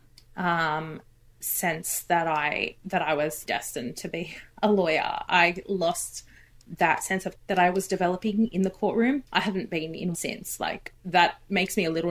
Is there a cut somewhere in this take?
yes; 4 cuts; at 3.4 s, 7.3 s, 9.3 s, 10.1 s

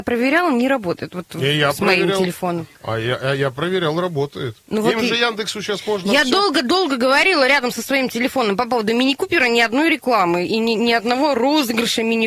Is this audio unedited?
no; 2 cuts; at 2.7 s, 4.6 s

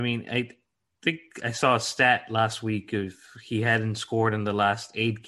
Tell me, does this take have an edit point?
no; 0 cuts

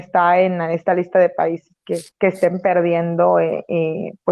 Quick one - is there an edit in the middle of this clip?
yes; 1 cut; at 2.1 s

